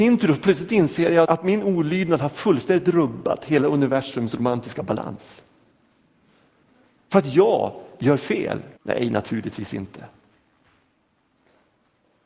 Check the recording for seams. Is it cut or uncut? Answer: cut